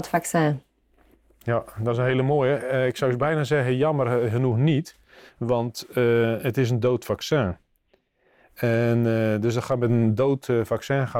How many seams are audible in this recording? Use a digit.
0